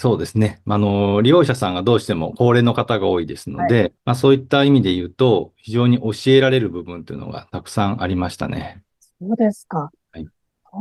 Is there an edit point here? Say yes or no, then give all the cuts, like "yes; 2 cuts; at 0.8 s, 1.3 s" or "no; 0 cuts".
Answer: yes; 2 cuts; at 4.0 s, 8.9 s